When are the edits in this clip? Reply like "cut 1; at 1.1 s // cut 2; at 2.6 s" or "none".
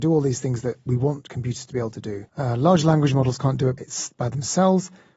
cut 1; at 2.3 s // cut 2; at 3.8 s